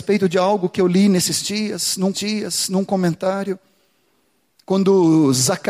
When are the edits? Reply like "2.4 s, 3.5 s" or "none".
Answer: 2.1 s